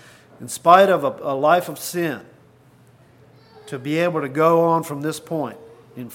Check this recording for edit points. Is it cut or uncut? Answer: uncut